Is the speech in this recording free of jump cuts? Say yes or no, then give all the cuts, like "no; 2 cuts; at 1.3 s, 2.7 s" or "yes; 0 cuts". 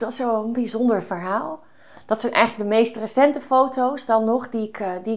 yes; 0 cuts